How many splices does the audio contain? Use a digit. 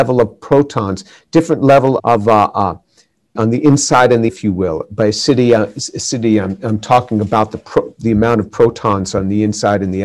3